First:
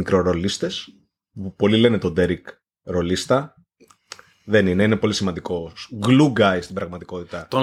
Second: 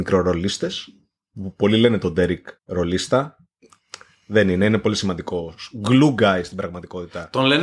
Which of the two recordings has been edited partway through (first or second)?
second